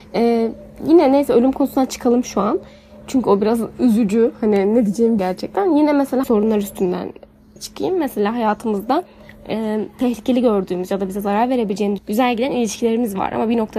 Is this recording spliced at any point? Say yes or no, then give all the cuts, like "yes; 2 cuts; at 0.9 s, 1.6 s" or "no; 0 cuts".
yes; 4 cuts; at 5.2 s, 6.2 s, 7.6 s, 12.0 s